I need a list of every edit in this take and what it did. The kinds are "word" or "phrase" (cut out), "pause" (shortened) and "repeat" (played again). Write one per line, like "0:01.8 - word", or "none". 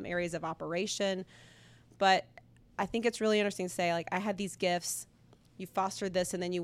none